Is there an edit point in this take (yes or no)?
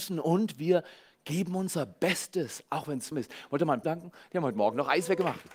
yes